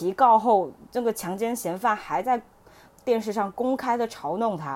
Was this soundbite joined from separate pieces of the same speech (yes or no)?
no